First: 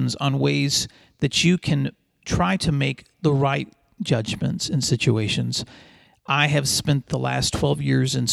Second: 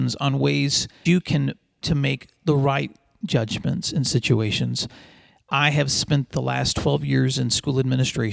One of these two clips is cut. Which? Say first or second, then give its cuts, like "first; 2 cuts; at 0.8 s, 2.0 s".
second; 2 cuts; at 1.1 s, 1.8 s